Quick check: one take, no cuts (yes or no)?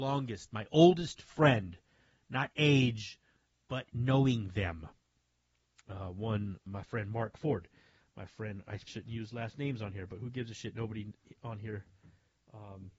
no